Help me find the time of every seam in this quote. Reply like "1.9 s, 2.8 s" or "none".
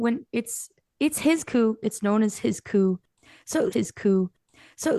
3.7 s